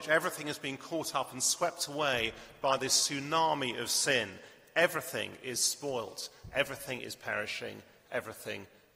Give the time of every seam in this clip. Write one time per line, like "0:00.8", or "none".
none